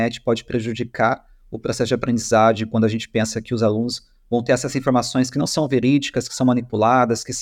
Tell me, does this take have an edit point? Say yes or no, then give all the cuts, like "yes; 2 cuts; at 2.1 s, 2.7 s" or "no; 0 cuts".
no; 0 cuts